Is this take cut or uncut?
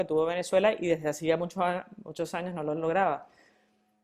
uncut